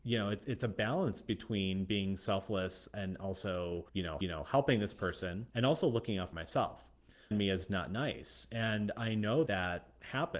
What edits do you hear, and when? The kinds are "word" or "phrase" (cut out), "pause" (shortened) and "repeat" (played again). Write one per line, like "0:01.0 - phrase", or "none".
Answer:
0:03.9 - pause
0:04.2 - repeat
0:05.5 - pause
0:06.3 - word
0:07.3 - phrase
0:09.5 - word

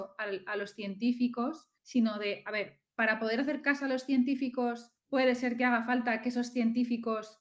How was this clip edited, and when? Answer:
0:01.8 - pause
0:05.0 - pause

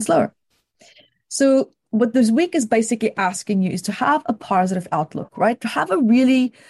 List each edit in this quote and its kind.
none

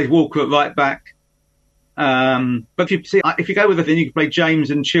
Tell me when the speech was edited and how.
0:02.9 - word
0:03.2 - word
0:03.9 - word

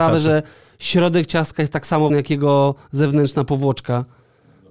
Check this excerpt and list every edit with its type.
0:02.1 - word

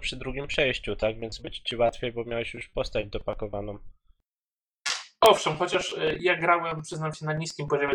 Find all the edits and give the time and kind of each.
0:01.4 - word

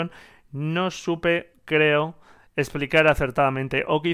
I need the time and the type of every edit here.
none

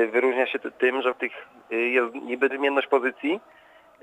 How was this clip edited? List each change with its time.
0:01.1 - word
0:02.5 - word

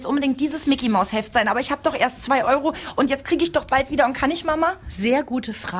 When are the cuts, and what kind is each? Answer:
none

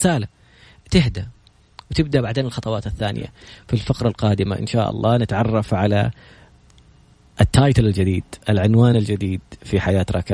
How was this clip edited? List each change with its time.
none

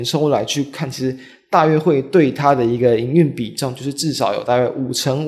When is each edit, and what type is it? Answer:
none

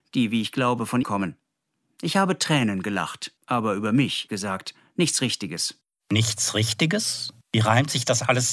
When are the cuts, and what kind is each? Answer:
0:01.0 - word
0:03.4 - pause
0:04.3 - word
0:07.4 - pause

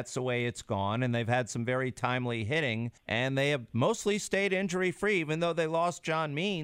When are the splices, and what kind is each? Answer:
0:03.0 - pause

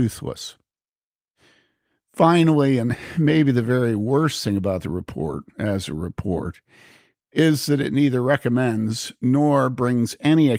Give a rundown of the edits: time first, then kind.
0:05.5 - pause

